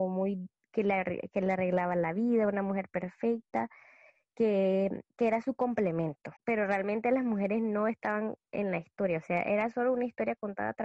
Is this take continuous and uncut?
no; 2 cuts; at 5.1 s, 6.4 s

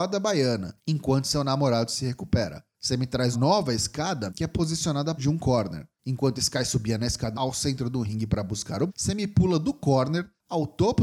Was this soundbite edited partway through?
yes; 5 cuts; at 3.3 s, 4.3 s, 5.2 s, 7.3 s, 8.9 s

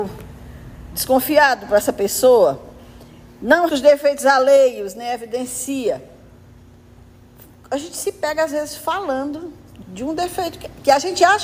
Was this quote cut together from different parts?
yes; 2 cuts; at 3.7 s, 9.8 s

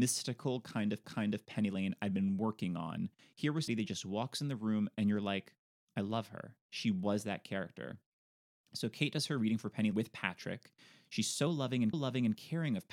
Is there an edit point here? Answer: yes; 4 cuts; at 1.0 s, 3.7 s, 9.9 s, 11.9 s

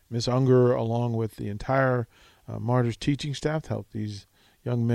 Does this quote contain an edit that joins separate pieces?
no; 0 cuts

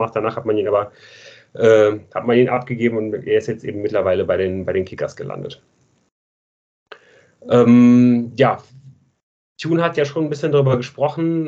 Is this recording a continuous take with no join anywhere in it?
yes; 0 cuts

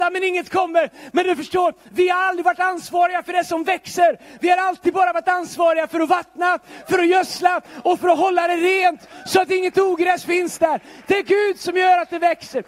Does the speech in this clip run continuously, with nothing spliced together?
yes; 0 cuts

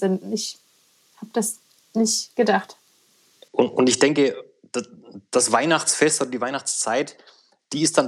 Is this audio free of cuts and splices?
yes; 0 cuts

